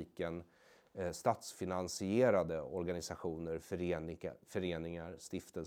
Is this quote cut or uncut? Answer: uncut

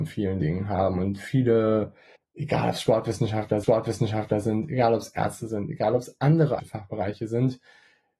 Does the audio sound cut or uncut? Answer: cut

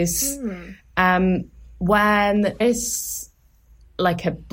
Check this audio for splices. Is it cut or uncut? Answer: cut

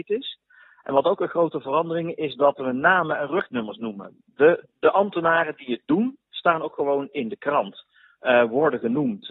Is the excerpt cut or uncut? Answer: cut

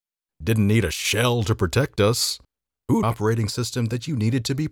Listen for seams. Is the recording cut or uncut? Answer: cut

